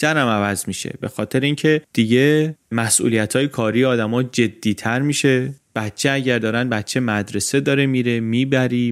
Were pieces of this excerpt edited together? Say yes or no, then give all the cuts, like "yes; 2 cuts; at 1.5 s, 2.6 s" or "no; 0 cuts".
no; 0 cuts